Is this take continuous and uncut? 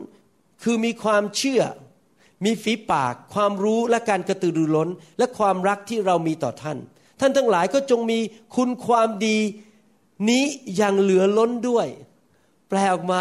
yes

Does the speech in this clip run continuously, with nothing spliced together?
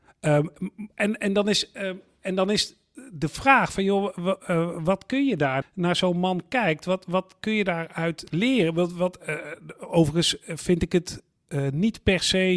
no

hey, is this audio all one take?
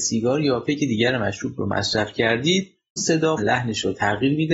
no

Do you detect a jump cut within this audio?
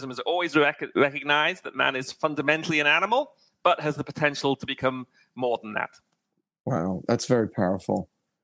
no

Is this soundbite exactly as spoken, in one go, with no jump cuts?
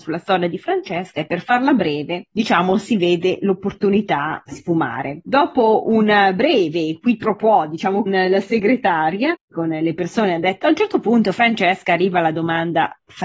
no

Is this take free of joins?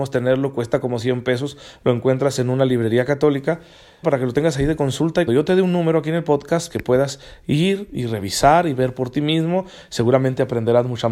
no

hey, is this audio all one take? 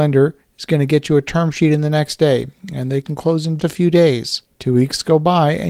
no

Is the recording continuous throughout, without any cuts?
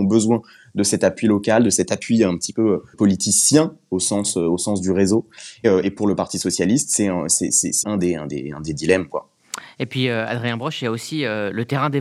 no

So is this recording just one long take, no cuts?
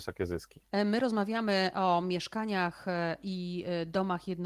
yes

